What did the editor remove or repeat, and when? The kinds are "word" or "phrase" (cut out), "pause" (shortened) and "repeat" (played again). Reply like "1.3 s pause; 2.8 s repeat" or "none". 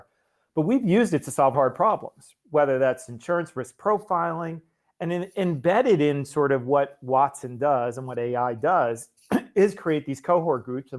1.5 s word